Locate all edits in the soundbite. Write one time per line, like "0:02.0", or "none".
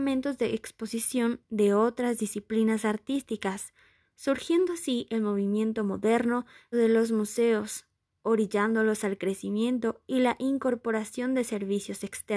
0:06.7